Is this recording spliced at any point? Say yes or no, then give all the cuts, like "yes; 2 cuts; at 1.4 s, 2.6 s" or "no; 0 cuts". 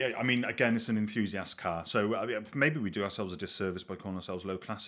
no; 0 cuts